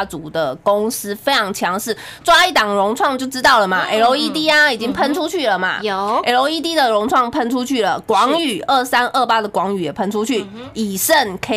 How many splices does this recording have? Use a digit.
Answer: 0